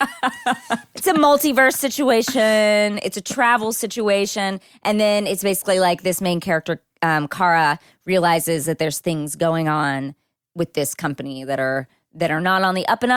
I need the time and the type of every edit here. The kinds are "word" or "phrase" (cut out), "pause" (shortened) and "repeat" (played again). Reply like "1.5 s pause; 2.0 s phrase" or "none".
none

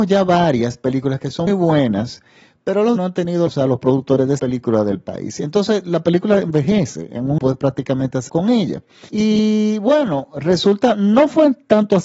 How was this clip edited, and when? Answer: 1.5 s word; 3.0 s word; 3.5 s phrase; 4.4 s phrase; 7.4 s phrase; 8.3 s word; 9.1 s pause

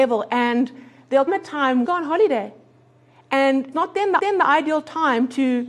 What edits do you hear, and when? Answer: 1.3 s word; 1.8 s phrase; 3.7 s word; 4.2 s repeat

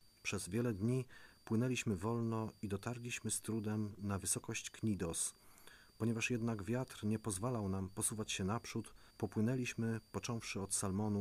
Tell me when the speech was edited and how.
9.1 s pause

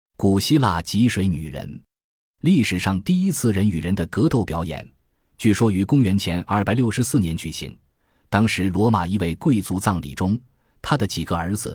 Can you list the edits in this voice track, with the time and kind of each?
none

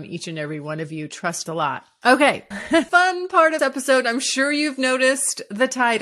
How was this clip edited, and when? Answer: 1.5 s phrase; 2.5 s word; 2.9 s phrase; 3.6 s word

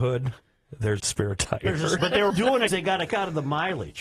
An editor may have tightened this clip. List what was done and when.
1.0 s word; 2.0 s word; 2.3 s word; 2.7 s word; 3.1 s word

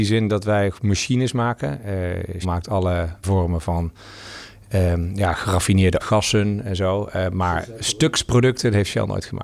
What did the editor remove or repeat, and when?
2.4 s word; 3.2 s word; 6.0 s word

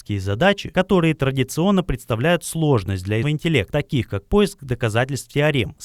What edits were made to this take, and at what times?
3.2 s word

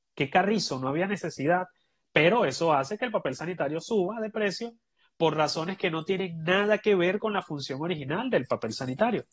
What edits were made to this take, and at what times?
none

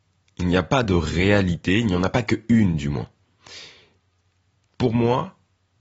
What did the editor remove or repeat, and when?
none

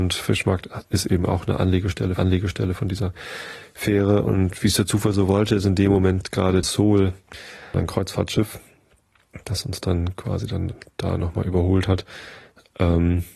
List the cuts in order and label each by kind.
2.2 s repeat; 6.6 s phrase; 7.7 s word

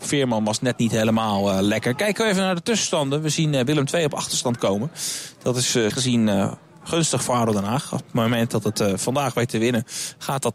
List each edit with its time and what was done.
5.9 s word

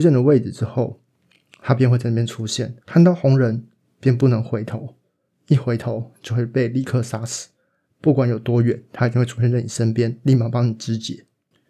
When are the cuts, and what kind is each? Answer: 2.8 s pause

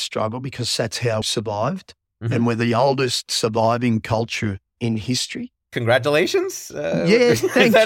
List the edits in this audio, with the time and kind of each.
1.2 s word

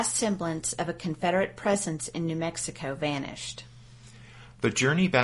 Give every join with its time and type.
none

